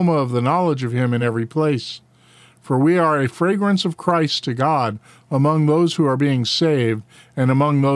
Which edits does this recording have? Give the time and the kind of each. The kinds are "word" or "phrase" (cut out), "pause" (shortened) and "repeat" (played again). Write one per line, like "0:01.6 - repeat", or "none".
none